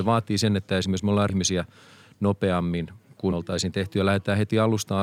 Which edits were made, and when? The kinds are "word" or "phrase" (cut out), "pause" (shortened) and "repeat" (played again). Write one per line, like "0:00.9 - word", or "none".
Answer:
0:01.3 - word
0:03.3 - word